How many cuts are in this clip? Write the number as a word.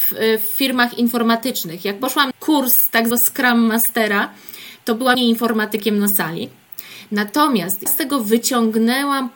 four